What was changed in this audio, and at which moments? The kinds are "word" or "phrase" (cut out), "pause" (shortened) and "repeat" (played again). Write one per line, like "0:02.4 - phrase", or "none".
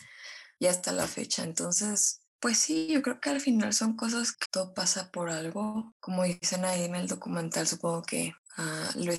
0:04.4 - word